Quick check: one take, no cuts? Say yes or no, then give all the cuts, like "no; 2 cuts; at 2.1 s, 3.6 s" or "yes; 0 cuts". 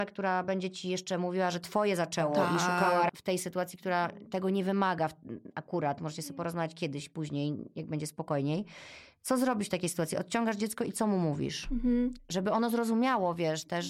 no; 1 cut; at 3.1 s